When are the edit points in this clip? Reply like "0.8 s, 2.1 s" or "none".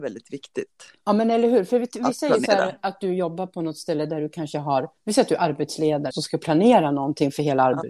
5.0 s, 6.1 s